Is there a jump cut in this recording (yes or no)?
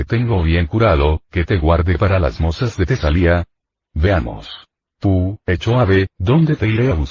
no